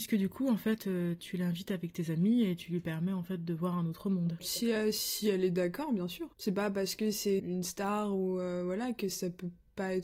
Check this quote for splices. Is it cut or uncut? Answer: cut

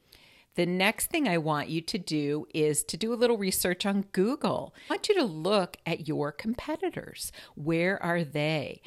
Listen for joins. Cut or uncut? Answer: uncut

